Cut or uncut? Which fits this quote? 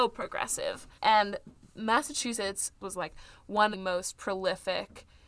cut